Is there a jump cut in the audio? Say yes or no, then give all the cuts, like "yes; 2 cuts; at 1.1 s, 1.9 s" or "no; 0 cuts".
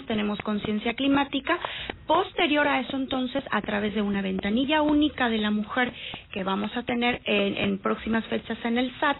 no; 0 cuts